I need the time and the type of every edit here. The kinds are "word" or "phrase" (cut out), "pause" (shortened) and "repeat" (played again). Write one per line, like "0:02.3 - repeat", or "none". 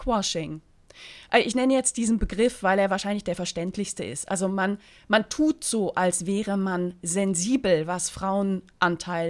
none